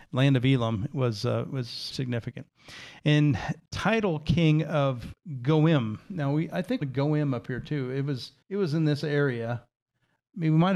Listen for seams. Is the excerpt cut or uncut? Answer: cut